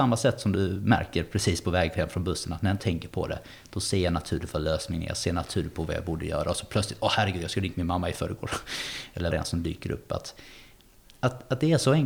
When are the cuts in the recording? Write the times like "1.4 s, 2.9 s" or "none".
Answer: 2.8 s, 9.3 s